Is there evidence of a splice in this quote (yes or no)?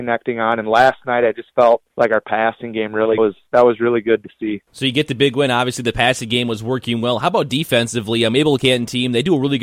yes